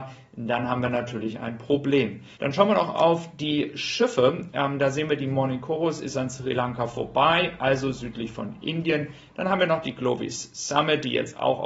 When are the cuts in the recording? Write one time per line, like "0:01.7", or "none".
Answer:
0:02.3